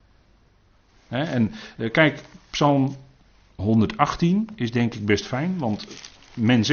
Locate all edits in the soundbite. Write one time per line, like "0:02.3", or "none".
none